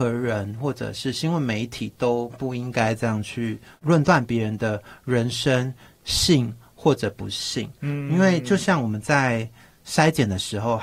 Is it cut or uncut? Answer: uncut